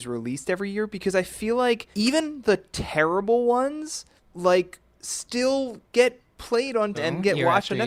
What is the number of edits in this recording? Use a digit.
3